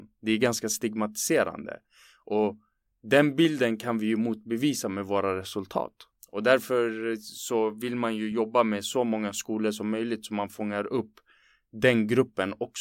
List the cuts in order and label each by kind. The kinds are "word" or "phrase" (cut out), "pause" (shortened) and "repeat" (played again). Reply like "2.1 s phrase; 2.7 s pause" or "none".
none